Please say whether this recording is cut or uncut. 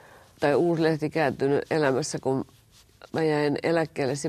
uncut